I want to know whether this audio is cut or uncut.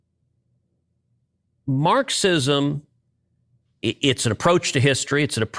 uncut